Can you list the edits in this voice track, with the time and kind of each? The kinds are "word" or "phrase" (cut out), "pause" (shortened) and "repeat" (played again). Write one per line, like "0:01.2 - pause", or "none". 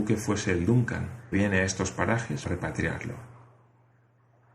0:01.3 - word
0:02.4 - word